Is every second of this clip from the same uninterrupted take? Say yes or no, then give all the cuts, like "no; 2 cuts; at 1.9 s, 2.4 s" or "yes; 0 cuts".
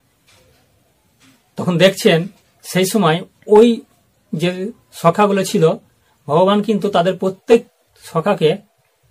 yes; 0 cuts